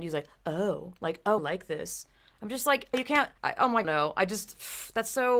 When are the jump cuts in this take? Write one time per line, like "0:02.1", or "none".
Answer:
0:01.4
0:02.9
0:03.4
0:03.8